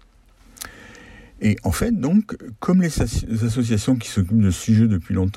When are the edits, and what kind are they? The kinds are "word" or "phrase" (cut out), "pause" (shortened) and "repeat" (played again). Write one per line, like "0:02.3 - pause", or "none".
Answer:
none

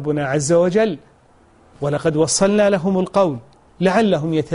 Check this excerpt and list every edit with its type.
none

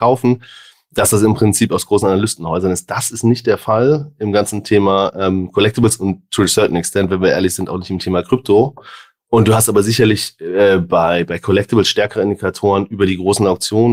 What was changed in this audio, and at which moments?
none

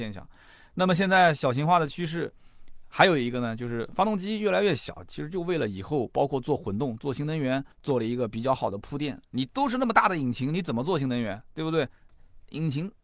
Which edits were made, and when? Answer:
0:07.7 - pause
0:09.2 - pause

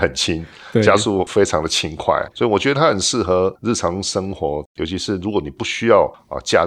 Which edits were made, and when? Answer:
0:02.3 - pause

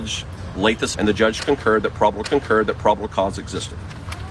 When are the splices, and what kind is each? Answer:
0:00.9 - word
0:02.2 - repeat

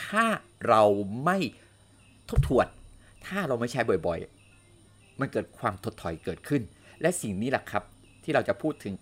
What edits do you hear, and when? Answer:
none

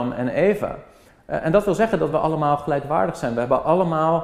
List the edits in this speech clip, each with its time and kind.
none

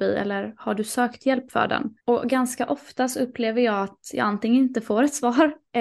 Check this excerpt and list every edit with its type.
0:02.0 - pause

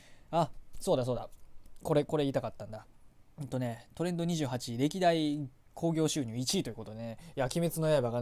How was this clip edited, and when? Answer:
0:03.3 - pause

